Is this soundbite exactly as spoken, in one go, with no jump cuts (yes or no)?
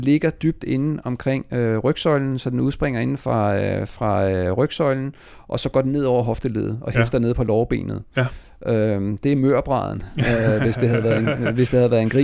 yes